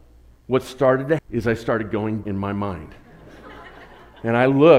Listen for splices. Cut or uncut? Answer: cut